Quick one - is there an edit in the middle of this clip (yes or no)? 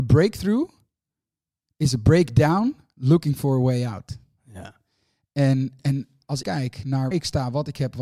yes